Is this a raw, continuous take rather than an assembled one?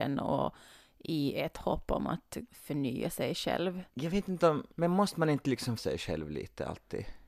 no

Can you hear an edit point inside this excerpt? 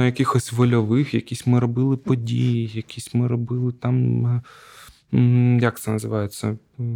no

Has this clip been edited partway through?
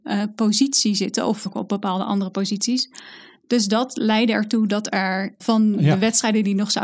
yes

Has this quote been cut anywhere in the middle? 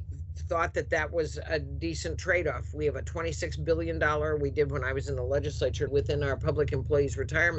yes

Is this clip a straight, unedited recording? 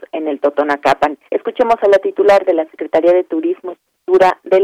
no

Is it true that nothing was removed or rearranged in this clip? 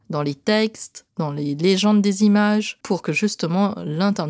yes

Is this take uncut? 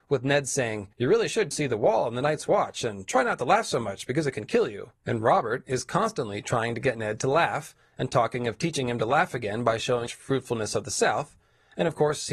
no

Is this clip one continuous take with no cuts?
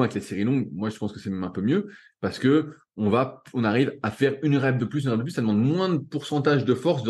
yes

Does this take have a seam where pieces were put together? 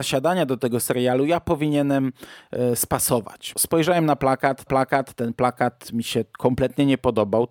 yes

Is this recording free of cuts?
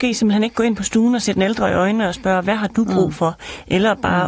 yes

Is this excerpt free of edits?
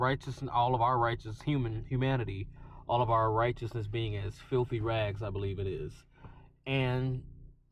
yes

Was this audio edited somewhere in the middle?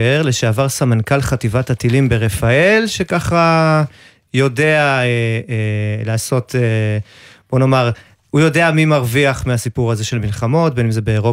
no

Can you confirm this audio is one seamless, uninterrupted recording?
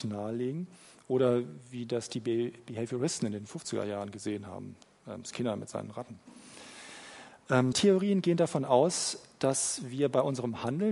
no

